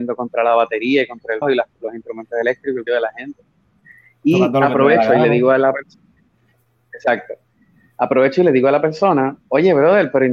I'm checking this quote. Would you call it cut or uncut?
cut